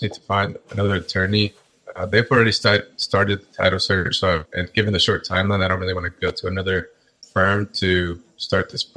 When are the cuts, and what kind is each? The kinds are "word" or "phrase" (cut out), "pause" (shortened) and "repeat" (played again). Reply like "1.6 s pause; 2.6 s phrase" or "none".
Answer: 4.5 s word